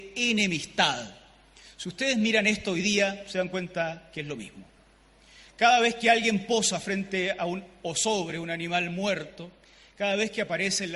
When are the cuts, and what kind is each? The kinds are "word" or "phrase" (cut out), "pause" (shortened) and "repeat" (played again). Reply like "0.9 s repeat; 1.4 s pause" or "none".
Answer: none

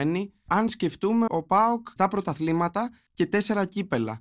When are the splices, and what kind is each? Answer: 1.3 s word; 2.0 s word

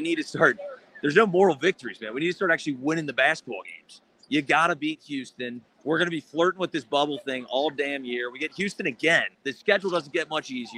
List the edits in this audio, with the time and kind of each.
5.7 s pause; 9.3 s pause

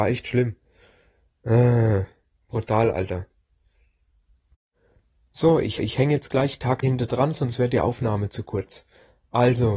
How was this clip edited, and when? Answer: 5.8 s repeat; 6.8 s word

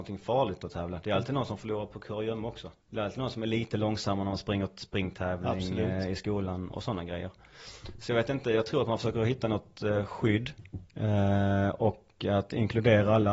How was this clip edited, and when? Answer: 2.8 s pause; 10.9 s pause

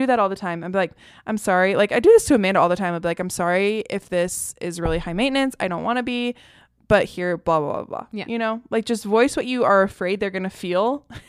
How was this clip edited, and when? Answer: none

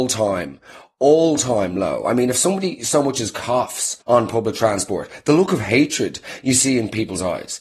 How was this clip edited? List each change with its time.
4.0 s pause

